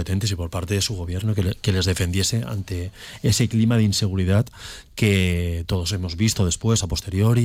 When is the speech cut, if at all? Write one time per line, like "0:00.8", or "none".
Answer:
none